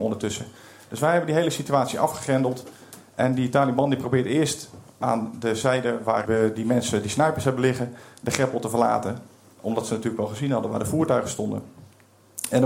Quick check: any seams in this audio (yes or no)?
yes